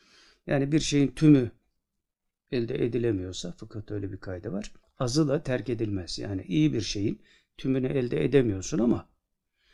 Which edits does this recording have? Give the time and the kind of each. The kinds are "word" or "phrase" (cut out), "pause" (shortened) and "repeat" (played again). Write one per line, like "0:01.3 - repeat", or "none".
0:04.8 - pause

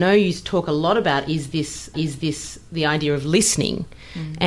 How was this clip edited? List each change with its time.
0:01.9 - repeat

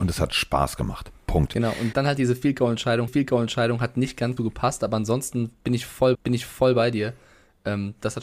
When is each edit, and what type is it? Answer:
0:01.9 - word
0:03.1 - repeat
0:04.4 - word
0:06.1 - repeat

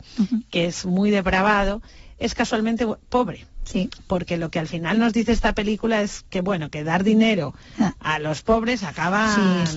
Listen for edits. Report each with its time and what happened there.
0:06.3 - pause

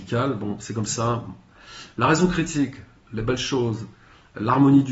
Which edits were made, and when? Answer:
none

